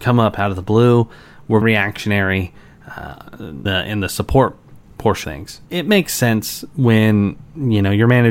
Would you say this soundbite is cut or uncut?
cut